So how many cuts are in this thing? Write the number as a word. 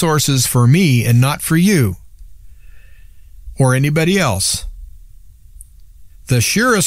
zero